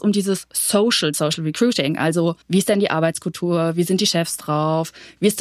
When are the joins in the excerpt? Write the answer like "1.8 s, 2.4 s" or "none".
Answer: 1.1 s, 2.4 s